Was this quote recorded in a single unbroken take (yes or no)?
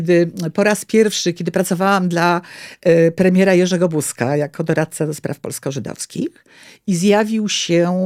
yes